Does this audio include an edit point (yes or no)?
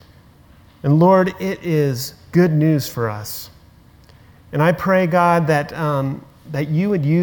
no